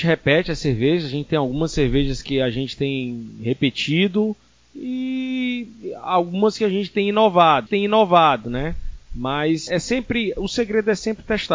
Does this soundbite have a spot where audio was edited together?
yes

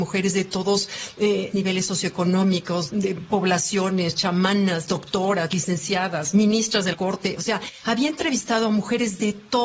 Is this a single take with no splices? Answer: no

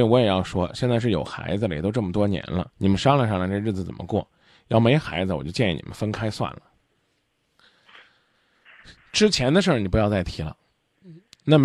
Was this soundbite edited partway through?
yes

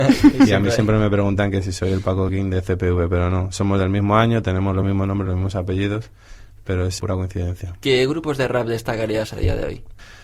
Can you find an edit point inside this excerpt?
no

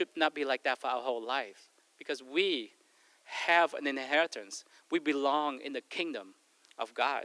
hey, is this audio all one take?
yes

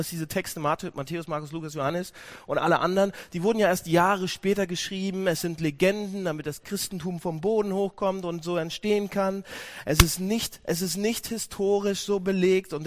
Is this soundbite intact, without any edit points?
yes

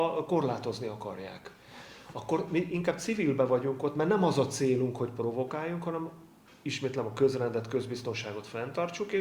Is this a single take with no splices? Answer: yes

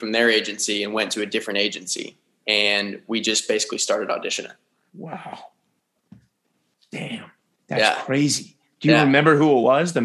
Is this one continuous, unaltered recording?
yes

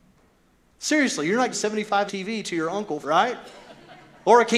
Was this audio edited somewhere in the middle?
yes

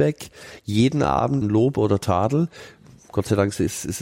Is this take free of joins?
no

